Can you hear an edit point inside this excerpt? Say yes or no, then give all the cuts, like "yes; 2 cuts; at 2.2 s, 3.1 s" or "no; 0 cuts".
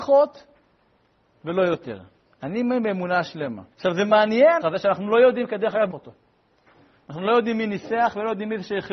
yes; 3 cuts; at 3.7 s, 4.6 s, 5.9 s